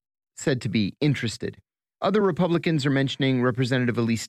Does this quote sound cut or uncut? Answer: uncut